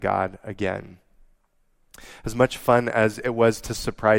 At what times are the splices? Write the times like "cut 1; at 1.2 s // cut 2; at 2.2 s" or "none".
none